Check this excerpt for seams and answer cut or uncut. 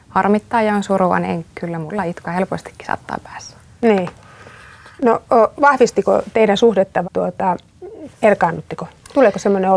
cut